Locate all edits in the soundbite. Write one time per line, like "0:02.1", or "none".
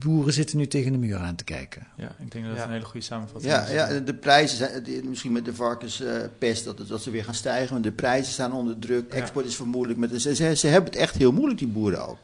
0:09.1